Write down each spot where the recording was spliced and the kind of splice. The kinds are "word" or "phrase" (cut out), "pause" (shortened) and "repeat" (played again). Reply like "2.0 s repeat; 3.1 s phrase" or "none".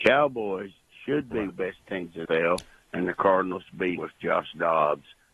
1.5 s word; 2.3 s word; 4.0 s word

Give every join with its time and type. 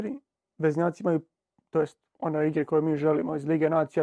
none

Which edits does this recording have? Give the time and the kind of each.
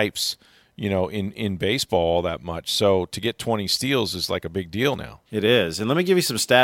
5.3 s pause

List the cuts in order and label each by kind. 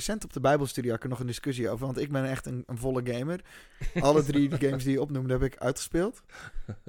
none

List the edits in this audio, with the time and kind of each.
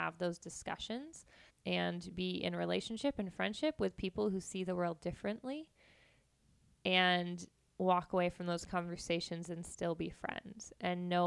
1.5 s word

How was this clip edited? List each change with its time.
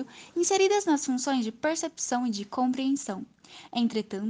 none

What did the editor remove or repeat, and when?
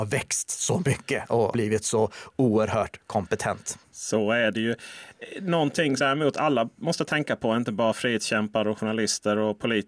1.5 s word; 6.0 s phrase

